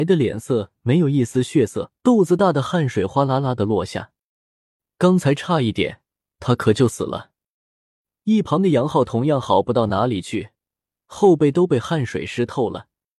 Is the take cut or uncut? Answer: cut